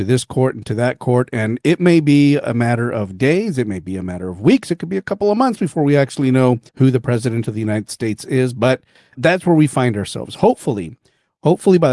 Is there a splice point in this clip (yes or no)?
yes